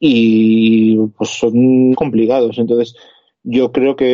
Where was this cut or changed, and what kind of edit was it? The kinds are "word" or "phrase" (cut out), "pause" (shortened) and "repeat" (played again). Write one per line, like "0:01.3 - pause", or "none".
0:01.9 - word